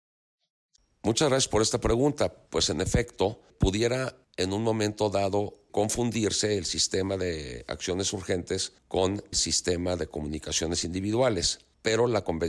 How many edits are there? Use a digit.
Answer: 1